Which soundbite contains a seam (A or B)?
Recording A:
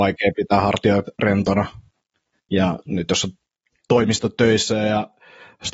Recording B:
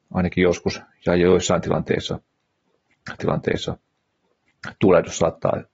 B